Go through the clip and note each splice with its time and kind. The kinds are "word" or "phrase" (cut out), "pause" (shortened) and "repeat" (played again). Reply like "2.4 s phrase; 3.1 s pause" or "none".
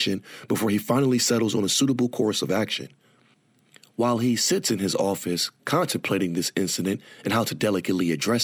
none